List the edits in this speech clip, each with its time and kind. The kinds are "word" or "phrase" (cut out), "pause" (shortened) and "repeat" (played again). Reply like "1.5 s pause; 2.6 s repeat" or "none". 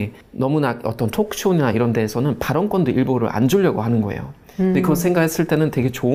none